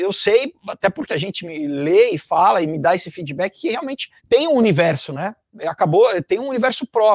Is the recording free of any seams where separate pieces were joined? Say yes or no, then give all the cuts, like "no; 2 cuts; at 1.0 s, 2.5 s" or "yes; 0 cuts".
no; 2 cuts; at 1.1 s, 4.2 s